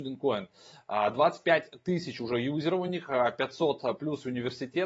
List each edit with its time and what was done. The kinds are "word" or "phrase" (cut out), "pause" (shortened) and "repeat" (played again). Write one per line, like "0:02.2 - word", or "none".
none

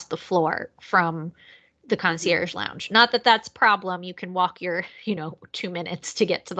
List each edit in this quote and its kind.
none

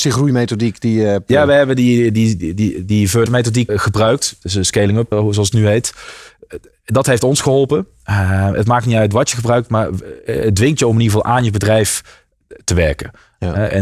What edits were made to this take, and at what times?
0:03.3 - word
0:03.7 - word
0:05.1 - word

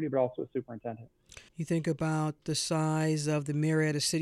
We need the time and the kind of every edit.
0:01.5 - pause

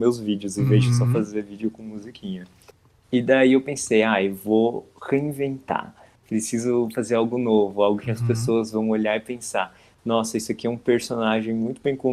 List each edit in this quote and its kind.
none

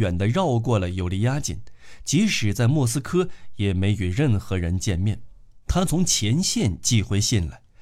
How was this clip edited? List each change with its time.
0:05.6 - pause

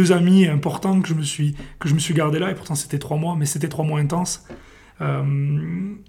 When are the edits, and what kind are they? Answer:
none

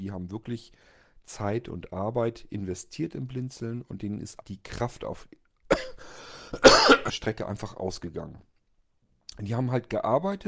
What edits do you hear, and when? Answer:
0:04.4 - word
0:07.1 - phrase

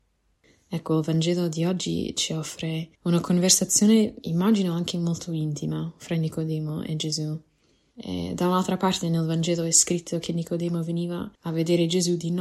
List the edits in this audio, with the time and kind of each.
0:02.9 - pause
0:11.3 - pause

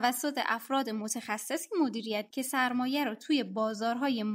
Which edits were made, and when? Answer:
0:02.3 - word

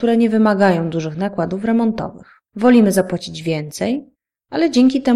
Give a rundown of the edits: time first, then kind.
0:02.5 - pause

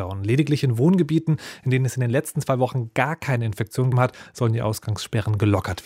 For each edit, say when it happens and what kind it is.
0:03.9 - word

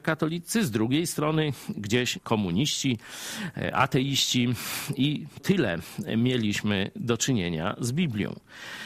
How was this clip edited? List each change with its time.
0:02.2 - word
0:05.4 - word

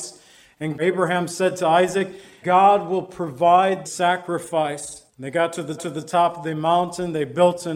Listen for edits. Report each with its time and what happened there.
0:02.4 - word
0:03.9 - word
0:05.1 - pause
0:05.8 - repeat

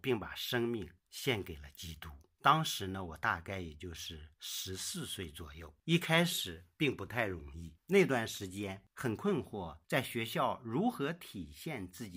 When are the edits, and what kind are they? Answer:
0:01.0 - pause
0:04.3 - pause

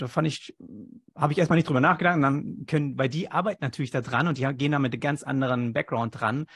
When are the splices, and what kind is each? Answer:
none

